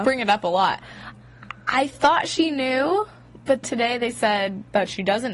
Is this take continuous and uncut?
no; 1 cut; at 3.6 s

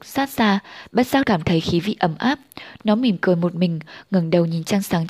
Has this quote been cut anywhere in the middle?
yes; 1 cut; at 1.2 s

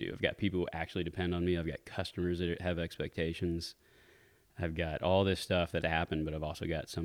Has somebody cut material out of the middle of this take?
yes; 1 cut; at 5.8 s

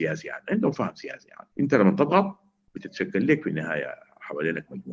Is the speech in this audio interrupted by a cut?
yes; 1 cut; at 1.5 s

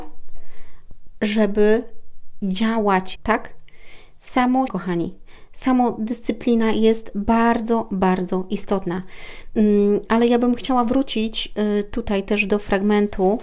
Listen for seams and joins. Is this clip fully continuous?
no; 2 cuts; at 3.1 s, 4.7 s

